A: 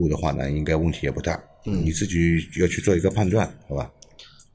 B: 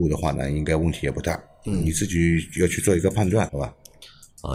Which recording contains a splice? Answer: B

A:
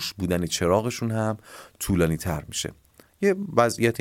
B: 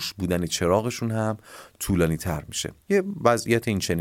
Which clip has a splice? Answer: B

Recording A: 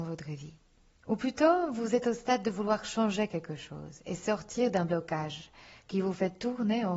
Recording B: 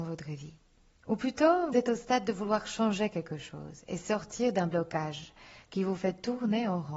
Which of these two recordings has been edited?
B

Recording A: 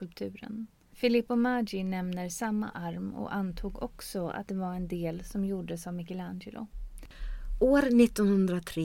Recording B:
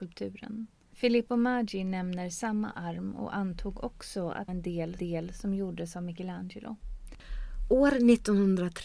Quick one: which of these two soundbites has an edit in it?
B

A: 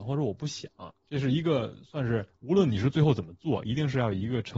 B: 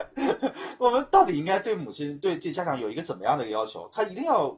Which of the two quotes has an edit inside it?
A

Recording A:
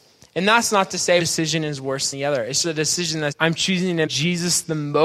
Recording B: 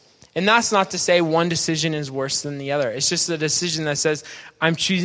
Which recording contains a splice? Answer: A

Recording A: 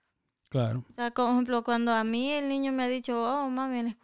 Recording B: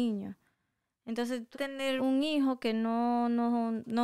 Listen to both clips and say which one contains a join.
B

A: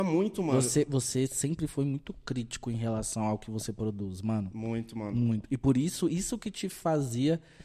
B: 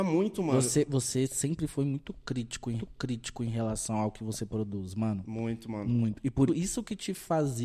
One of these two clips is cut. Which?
B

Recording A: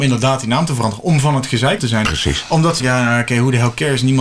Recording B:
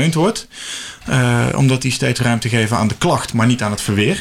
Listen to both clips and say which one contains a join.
A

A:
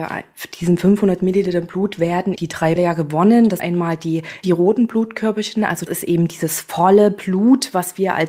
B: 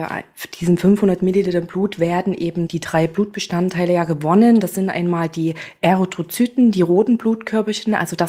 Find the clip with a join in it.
A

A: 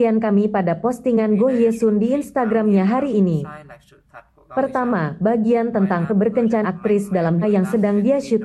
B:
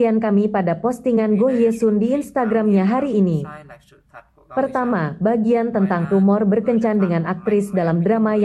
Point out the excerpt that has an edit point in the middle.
A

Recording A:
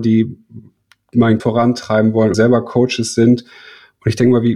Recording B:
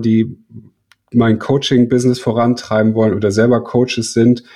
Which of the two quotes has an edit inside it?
A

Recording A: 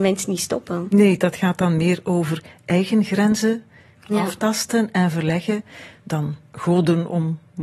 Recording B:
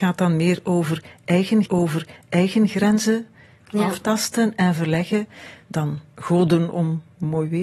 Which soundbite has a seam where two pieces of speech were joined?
B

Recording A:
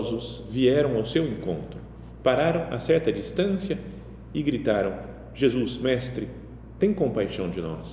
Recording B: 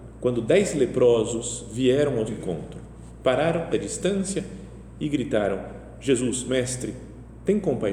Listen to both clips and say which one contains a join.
B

